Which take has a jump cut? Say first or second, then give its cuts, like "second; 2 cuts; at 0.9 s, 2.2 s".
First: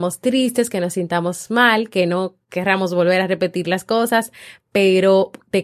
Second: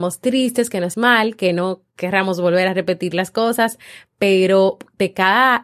second; 1 cut; at 0.9 s